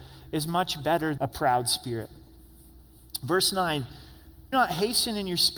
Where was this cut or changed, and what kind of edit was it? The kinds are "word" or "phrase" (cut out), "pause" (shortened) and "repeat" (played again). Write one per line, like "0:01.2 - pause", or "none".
0:01.2 - word
0:04.5 - word